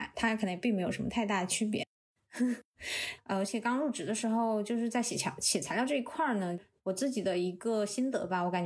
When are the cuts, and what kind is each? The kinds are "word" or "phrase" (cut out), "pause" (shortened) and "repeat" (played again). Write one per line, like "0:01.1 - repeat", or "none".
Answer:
none